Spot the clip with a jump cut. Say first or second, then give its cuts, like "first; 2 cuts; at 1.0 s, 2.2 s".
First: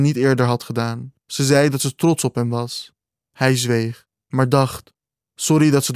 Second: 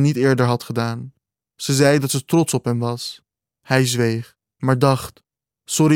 first; 1 cut; at 1.2 s